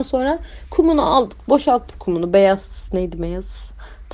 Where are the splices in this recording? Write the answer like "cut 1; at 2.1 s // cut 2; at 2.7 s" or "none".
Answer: none